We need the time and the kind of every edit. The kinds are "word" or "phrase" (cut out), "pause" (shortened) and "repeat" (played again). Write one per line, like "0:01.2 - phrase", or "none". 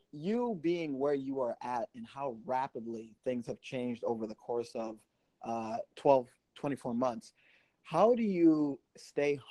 0:05.9 - pause